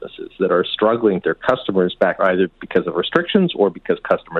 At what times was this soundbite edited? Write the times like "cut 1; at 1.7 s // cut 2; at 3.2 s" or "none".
cut 1; at 1.2 s // cut 2; at 2.2 s